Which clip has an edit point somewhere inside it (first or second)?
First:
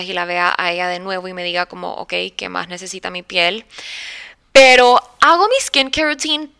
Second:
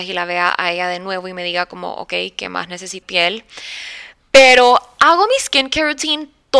second